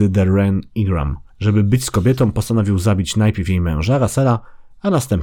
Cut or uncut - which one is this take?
cut